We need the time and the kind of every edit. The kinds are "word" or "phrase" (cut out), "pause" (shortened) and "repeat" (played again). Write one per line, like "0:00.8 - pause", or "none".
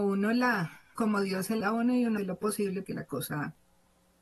0:01.0 - word
0:01.6 - word
0:02.2 - word
0:02.8 - word